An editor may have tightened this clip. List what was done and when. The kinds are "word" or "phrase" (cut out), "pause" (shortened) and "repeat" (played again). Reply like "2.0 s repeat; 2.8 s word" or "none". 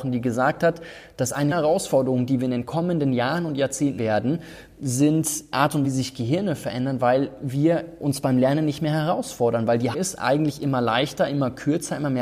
1.5 s word; 4.0 s word; 5.5 s word; 5.8 s word; 9.9 s word